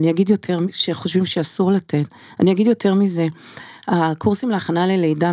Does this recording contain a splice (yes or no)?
no